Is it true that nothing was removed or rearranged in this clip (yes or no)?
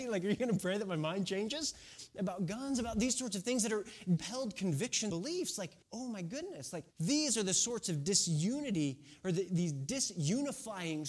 no